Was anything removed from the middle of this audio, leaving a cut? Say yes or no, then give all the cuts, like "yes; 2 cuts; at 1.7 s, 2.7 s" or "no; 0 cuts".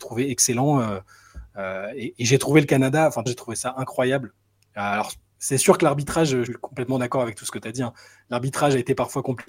yes; 2 cuts; at 3.3 s, 6.5 s